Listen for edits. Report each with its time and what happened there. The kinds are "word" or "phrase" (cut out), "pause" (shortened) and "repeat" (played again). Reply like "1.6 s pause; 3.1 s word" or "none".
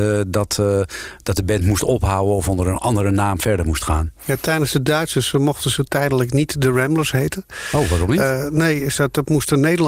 none